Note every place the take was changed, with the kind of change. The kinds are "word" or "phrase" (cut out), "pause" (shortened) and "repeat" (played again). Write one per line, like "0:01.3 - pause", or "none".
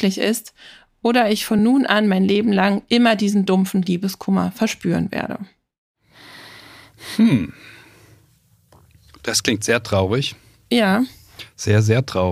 none

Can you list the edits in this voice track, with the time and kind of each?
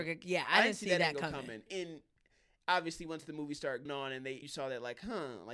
0:01.7 - word
0:03.9 - word
0:04.4 - word

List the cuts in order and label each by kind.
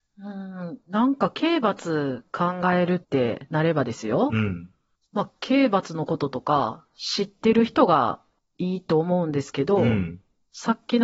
0:03.0 - pause

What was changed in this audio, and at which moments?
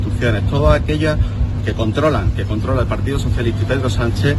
0:01.6 - word

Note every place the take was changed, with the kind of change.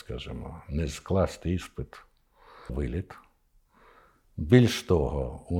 0:02.7 - word

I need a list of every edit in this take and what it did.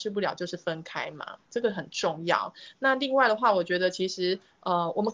0:01.5 - pause

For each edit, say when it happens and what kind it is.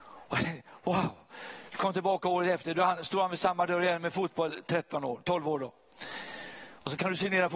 none

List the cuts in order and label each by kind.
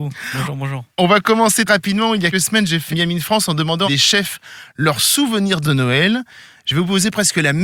0:01.7 - word
0:02.3 - word
0:02.9 - word
0:03.9 - word
0:05.6 - word

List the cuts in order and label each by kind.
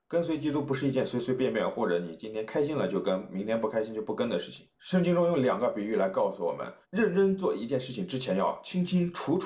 0:04.7 - pause
0:06.8 - pause

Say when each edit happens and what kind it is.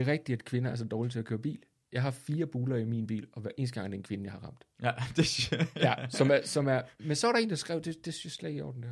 none

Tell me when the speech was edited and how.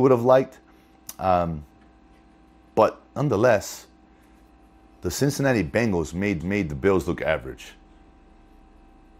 0:06.4 - repeat

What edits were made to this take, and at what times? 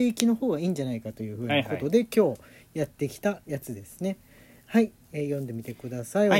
none

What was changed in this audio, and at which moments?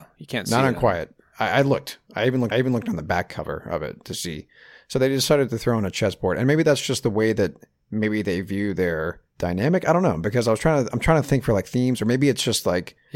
0:02.5 - repeat
0:09.3 - pause

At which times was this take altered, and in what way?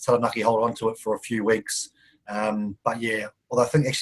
none

